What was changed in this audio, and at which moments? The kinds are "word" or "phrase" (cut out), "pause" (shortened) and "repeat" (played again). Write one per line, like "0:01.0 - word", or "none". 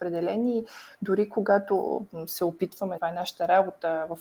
0:03.0 - word